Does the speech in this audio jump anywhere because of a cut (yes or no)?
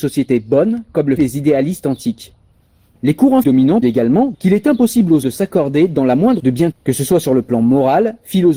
yes